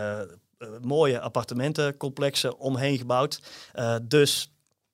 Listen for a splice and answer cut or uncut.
uncut